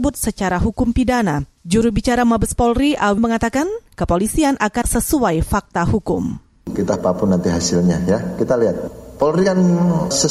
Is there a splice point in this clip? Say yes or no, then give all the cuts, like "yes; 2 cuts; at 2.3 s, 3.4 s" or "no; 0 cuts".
yes; 4 cuts; at 1.6 s, 3.2 s, 4.8 s, 7.0 s